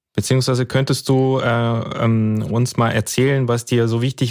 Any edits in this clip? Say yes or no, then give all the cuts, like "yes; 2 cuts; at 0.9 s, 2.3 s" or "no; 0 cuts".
no; 0 cuts